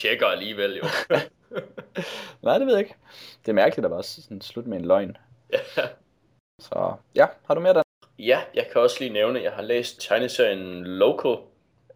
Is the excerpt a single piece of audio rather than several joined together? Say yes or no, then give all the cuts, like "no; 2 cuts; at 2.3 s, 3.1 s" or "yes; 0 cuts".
no; 1 cut; at 10.0 s